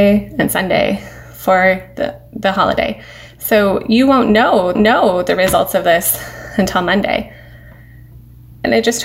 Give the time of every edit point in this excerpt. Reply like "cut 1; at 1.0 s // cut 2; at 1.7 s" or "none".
cut 1; at 4.8 s